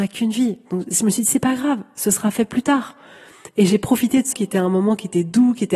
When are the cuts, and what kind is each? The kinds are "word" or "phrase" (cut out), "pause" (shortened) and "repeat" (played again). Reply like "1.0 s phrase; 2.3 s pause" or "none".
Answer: 4.3 s word